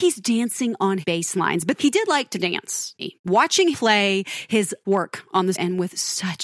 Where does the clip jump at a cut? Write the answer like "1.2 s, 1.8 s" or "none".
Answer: 1.0 s, 1.8 s, 3.0 s, 3.7 s, 4.8 s, 5.5 s